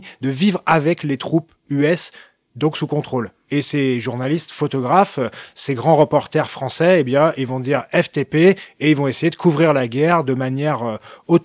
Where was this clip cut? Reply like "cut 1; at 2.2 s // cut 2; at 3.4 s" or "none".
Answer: none